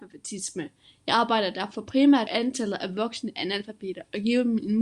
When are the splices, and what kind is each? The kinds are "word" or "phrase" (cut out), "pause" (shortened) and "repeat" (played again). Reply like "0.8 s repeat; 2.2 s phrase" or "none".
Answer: 2.3 s phrase